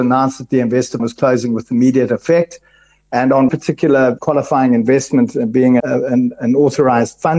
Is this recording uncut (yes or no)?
no